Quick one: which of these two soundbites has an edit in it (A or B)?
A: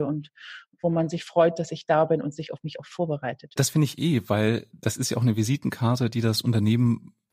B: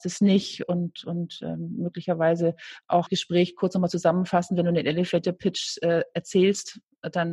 B